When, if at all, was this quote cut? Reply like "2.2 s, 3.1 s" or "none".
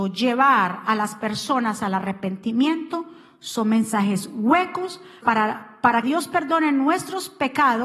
5.2 s, 6.0 s

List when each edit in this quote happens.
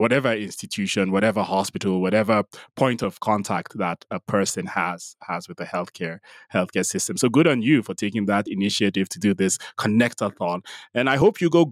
none

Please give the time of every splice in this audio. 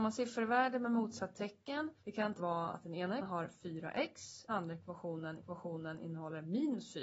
2.0 s, 2.4 s, 3.2 s, 4.5 s, 5.4 s

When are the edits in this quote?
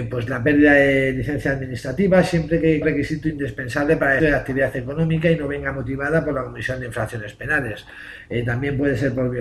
2.8 s, 4.2 s

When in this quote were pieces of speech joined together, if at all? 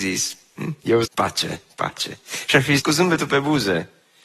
1.0 s, 2.8 s

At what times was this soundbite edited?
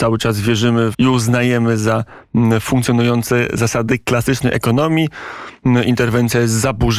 0.9 s

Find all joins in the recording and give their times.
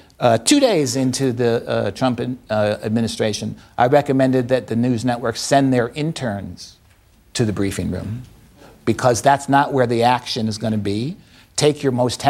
none

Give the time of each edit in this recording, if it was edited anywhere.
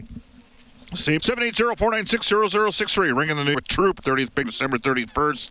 1.2 s, 3.5 s, 4.0 s, 4.4 s

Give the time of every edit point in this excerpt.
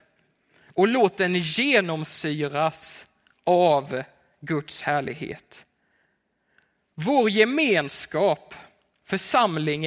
none

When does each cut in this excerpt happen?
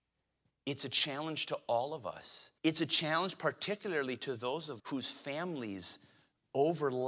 2.6 s, 4.8 s

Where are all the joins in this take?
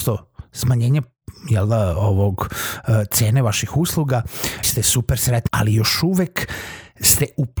4.6 s, 5.5 s

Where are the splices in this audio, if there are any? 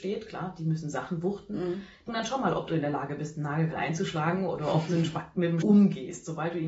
2.1 s, 3.7 s, 5.6 s

